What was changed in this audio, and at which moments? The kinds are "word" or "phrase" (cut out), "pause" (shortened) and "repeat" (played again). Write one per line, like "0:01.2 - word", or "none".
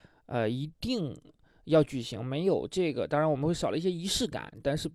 none